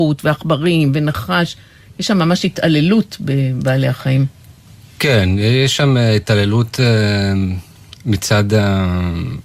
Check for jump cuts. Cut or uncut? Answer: uncut